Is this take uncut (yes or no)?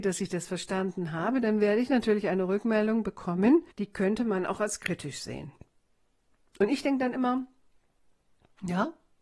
yes